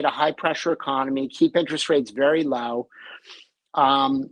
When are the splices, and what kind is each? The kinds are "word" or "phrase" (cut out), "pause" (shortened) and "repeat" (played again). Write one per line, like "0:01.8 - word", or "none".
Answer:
none